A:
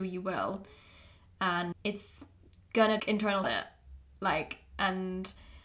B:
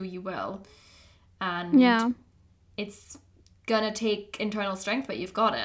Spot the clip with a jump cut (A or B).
A